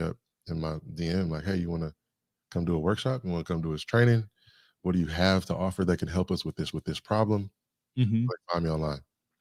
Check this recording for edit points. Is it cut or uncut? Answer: cut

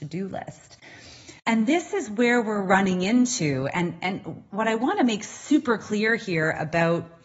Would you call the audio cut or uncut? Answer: cut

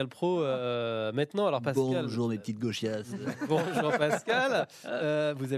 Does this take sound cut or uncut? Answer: uncut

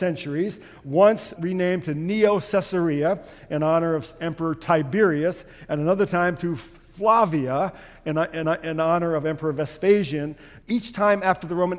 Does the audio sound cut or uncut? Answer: cut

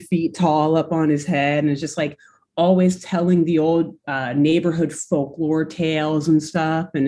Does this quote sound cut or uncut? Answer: uncut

